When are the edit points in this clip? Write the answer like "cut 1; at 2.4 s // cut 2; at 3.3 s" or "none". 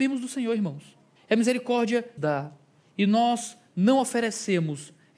cut 1; at 1.2 s // cut 2; at 2.2 s